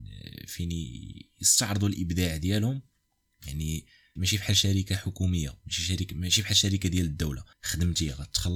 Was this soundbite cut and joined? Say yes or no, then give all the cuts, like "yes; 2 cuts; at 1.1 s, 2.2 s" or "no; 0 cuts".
yes; 2 cuts; at 4.2 s, 7.5 s